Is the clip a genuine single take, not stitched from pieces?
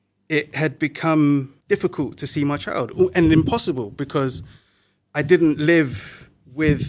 no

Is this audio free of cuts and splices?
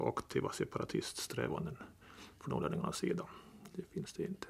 yes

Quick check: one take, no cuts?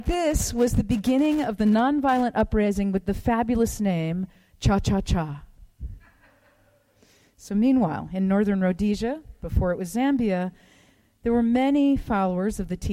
yes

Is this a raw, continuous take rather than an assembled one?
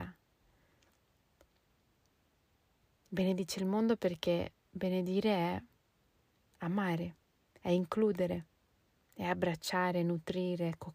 yes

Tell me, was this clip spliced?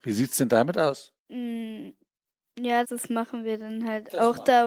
yes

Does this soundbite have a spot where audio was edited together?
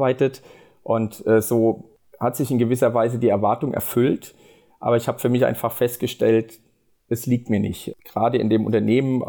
no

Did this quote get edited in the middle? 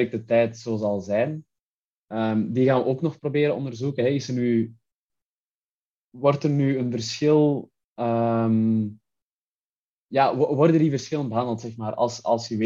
no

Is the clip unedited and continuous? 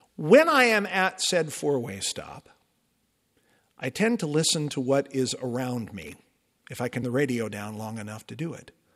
no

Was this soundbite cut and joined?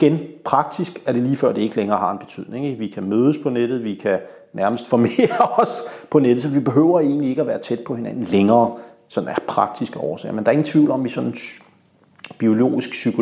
no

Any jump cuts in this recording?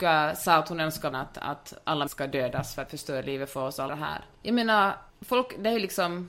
yes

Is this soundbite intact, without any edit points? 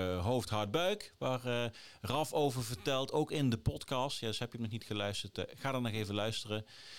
yes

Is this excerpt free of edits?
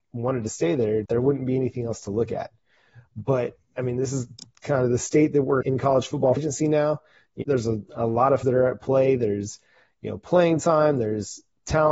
no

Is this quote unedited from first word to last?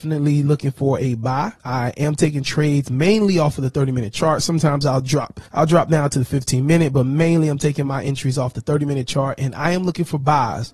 no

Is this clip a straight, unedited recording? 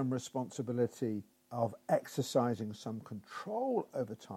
no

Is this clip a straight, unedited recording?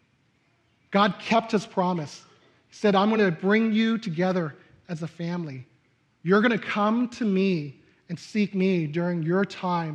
yes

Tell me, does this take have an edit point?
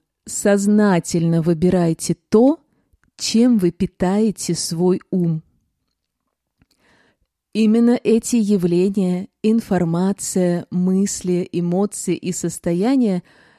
no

